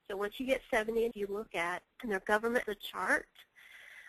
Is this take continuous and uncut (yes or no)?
no